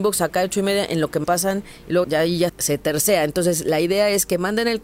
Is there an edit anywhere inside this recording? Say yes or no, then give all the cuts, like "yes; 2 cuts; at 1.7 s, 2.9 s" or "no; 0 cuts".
yes; 3 cuts; at 1.2 s, 2.0 s, 2.5 s